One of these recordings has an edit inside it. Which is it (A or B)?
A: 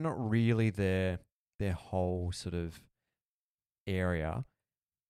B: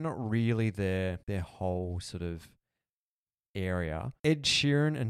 B